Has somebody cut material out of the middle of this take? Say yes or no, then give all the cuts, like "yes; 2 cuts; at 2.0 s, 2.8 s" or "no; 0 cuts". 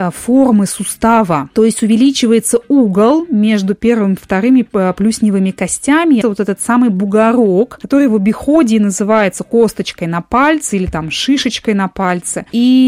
yes; 1 cut; at 6.2 s